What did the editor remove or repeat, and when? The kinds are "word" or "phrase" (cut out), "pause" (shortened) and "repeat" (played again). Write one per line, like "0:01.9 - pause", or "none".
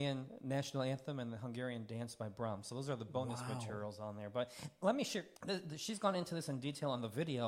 0:05.4 - pause